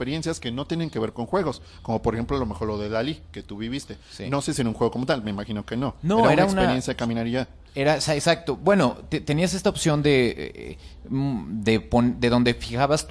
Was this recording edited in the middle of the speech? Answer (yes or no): no